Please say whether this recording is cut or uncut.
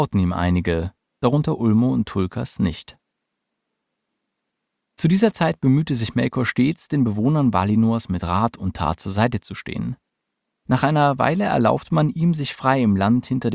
uncut